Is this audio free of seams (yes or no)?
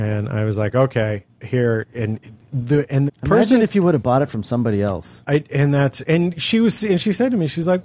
no